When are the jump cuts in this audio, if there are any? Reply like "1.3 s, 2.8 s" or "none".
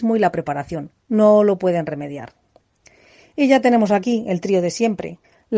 none